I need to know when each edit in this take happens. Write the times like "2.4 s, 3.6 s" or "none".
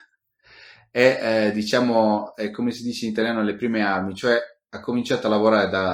none